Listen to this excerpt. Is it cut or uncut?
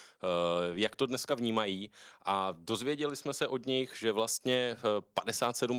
uncut